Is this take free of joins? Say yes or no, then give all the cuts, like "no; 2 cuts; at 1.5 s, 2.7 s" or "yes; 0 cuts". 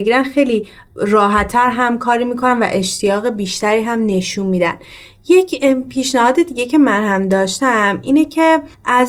yes; 0 cuts